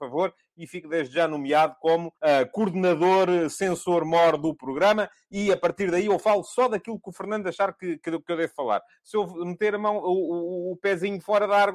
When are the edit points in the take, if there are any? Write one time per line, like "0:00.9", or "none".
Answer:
0:02.2